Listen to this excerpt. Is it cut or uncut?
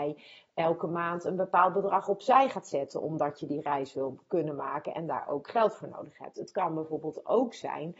uncut